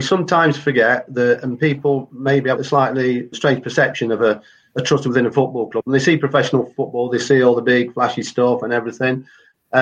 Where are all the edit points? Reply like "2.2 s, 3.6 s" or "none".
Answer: 2.6 s, 3.3 s

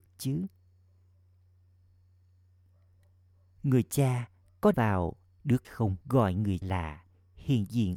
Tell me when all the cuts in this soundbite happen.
4.7 s, 5.6 s, 6.0 s, 6.6 s

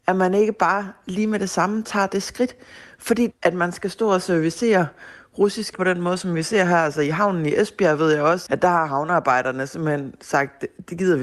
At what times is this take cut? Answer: 3.3 s, 5.7 s, 8.5 s

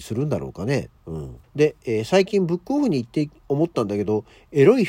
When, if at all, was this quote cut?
1.0 s, 1.4 s, 3.4 s

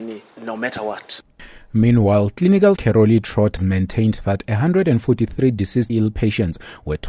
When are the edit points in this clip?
2.8 s, 3.6 s, 5.9 s

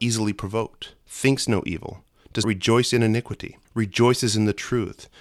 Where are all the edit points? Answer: 1.0 s, 2.4 s, 3.6 s

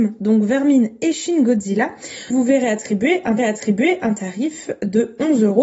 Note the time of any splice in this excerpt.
2.3 s, 3.4 s

